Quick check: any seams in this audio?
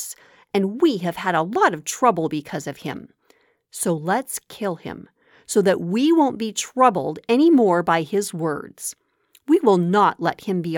no; 0 cuts

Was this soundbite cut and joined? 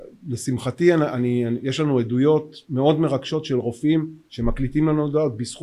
no; 0 cuts

